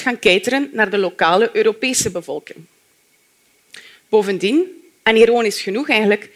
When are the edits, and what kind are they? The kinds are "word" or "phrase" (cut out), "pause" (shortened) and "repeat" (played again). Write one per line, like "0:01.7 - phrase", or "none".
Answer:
none